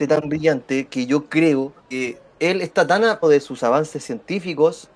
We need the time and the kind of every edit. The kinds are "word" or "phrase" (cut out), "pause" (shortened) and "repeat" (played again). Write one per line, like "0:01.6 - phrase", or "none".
0:01.8 - pause
0:03.2 - word